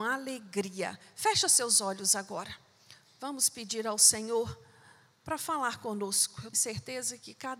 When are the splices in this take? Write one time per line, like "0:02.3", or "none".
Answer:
0:06.5